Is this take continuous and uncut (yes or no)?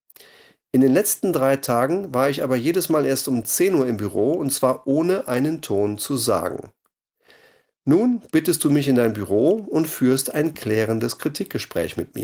yes